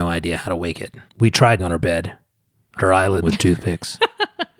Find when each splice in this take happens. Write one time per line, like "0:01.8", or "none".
0:01.1
0:01.6
0:02.8
0:03.2

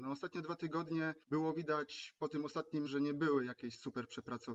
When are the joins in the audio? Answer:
0:01.2
0:02.9

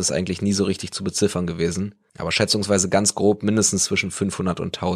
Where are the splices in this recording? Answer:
none

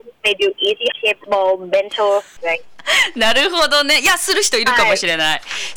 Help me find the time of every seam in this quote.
0:00.9
0:01.2
0:02.4

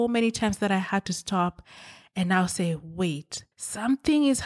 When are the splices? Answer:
0:03.5

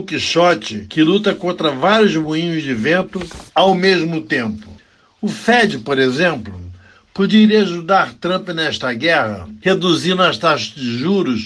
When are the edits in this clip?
none

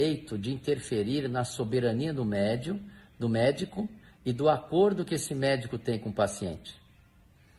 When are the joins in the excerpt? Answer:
none

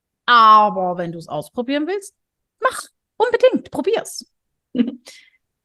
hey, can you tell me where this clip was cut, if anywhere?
none

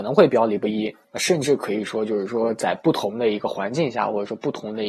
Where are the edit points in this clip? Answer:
0:01.0

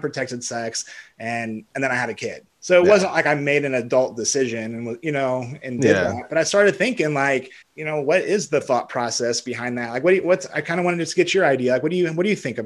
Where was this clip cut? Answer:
0:02.5
0:07.6

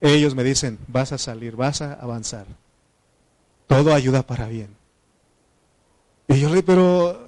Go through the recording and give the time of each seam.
none

